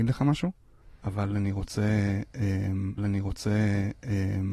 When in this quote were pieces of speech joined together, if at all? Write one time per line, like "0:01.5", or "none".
0:03.0

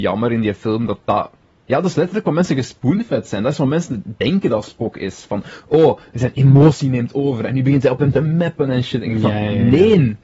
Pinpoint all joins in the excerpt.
none

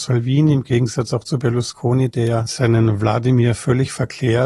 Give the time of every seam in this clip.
none

